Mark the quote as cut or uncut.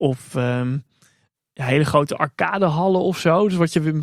uncut